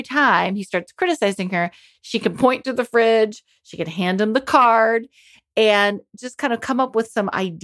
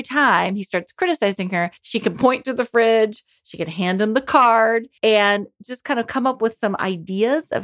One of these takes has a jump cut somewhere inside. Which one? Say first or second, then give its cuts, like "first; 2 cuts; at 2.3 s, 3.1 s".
second; 2 cuts; at 1.8 s, 5.0 s